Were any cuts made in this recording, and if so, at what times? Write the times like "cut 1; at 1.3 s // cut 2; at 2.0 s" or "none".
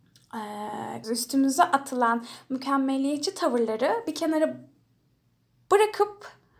cut 1; at 1.0 s

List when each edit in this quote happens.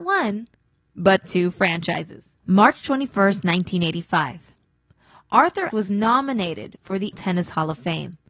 cut 1; at 2.4 s // cut 2; at 5.7 s // cut 3; at 7.1 s

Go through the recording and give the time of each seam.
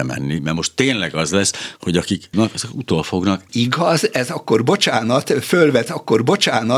cut 1; at 2.3 s // cut 2; at 3.5 s // cut 3; at 5.9 s

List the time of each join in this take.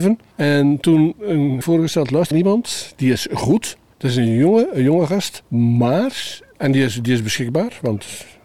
cut 1; at 1.6 s // cut 2; at 2.3 s

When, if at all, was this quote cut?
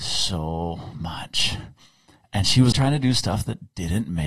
cut 1; at 2.7 s

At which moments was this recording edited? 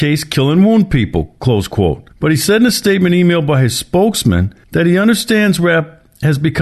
cut 1; at 2.1 s // cut 2; at 4.6 s

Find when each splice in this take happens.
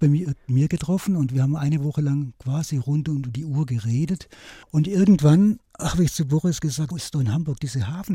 cut 1; at 4.6 s // cut 2; at 5.7 s // cut 3; at 6.9 s

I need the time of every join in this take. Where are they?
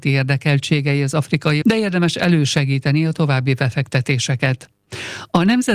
cut 1; at 1.6 s

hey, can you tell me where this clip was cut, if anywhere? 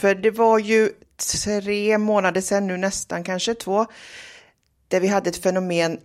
none

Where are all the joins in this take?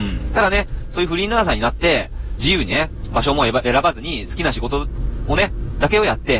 cut 1; at 2.4 s

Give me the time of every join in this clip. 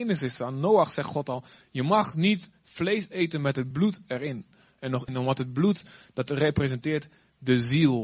none

